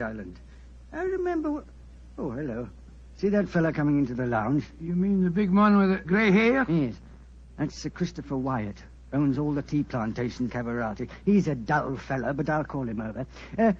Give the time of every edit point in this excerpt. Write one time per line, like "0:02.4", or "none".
0:06.0
0:10.5